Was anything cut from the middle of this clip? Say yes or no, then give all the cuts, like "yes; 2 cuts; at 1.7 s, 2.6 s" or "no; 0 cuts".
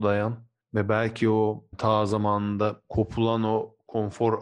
no; 0 cuts